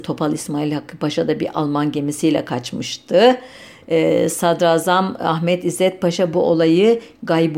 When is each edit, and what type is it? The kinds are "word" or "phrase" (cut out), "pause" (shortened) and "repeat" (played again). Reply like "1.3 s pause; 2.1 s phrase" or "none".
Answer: none